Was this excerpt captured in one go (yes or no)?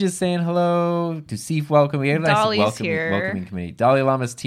yes